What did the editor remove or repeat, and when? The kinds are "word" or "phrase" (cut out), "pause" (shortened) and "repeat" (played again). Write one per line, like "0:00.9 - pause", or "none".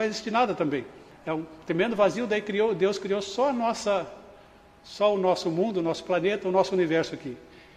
none